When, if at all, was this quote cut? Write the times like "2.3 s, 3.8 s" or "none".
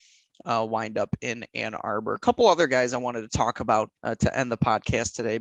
4.0 s